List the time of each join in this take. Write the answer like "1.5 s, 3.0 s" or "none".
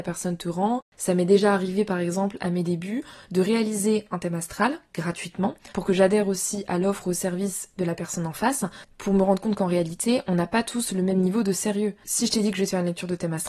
5.7 s